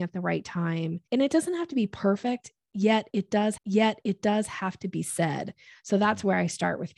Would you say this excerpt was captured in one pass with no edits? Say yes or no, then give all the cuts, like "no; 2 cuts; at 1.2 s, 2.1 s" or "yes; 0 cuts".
no; 2 cuts; at 1.1 s, 3.6 s